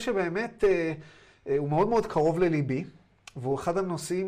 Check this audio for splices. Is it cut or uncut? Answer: uncut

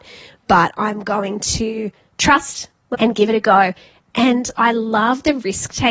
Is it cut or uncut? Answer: cut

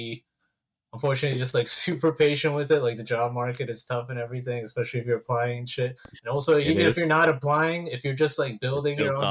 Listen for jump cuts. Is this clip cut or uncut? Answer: uncut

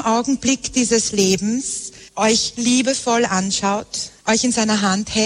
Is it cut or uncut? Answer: cut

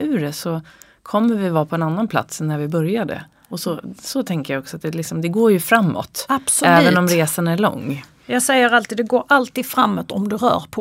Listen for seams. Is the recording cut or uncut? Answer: uncut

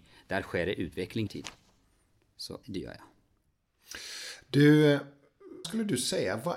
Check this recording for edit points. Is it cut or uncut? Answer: cut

